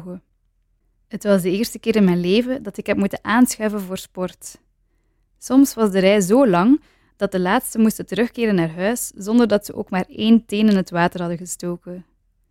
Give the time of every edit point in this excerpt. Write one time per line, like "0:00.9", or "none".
none